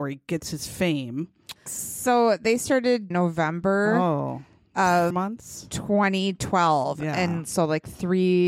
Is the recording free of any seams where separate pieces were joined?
no; 3 cuts; at 1.6 s, 3.1 s, 5.1 s

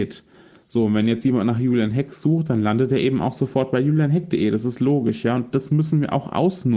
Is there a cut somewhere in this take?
no; 0 cuts

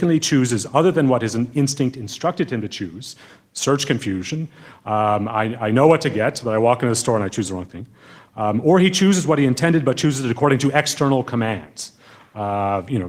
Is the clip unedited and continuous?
yes; 0 cuts

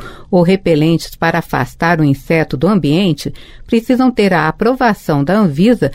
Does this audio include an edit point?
no; 0 cuts

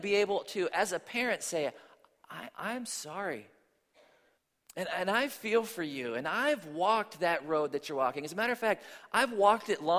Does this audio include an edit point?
yes; 2 cuts; at 2.5 s, 4.3 s

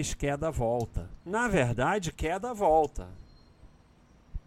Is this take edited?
yes; 1 cut; at 1.2 s

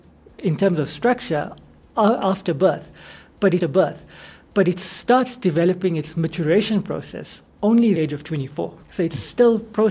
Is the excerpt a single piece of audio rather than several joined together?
no; 3 cuts; at 3.6 s, 8.0 s, 8.8 s

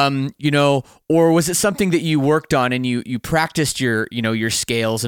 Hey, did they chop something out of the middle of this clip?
no; 0 cuts

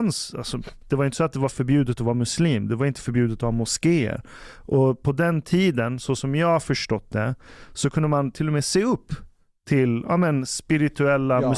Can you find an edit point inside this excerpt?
no; 0 cuts

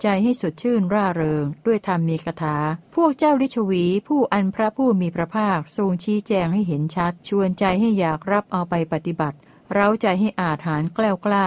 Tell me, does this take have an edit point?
yes; 3 cuts; at 2.8 s, 7.2 s, 9.5 s

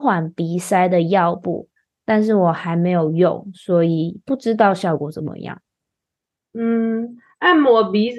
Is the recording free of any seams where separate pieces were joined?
yes; 0 cuts

